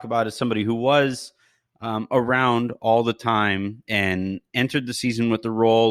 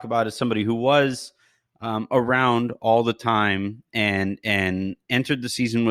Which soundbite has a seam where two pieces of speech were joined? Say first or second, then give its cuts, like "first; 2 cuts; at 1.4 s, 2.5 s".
first; 1 cut; at 3.8 s